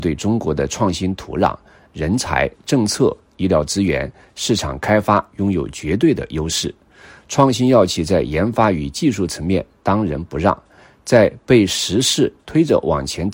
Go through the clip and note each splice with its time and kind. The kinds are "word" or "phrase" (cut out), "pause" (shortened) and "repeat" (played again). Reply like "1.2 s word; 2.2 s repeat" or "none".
none